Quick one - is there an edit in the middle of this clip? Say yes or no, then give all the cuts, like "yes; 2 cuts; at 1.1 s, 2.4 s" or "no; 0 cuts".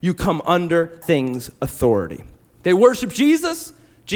yes; 2 cuts; at 1.0 s, 2.4 s